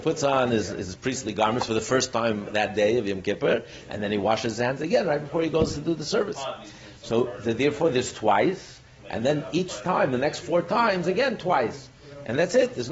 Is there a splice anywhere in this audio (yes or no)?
no